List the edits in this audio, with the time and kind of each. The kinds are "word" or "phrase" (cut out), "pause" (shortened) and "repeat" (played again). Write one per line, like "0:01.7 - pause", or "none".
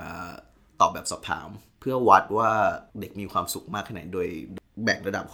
0:02.9 - pause